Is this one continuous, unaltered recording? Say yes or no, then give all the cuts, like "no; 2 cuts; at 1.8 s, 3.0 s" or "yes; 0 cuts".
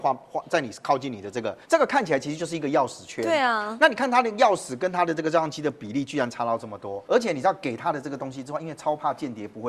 no; 2 cuts; at 1.6 s, 7.0 s